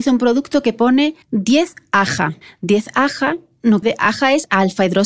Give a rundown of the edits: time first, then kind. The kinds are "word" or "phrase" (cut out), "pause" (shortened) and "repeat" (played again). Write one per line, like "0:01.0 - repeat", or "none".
0:01.2 - pause
0:02.4 - pause
0:03.8 - word